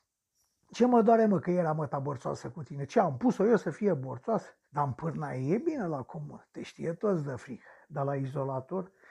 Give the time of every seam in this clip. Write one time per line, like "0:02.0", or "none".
0:04.6